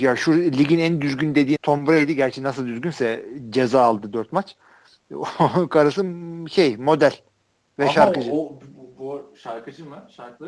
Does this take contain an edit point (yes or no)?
yes